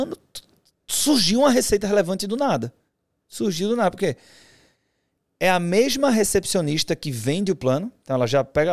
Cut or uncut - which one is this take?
uncut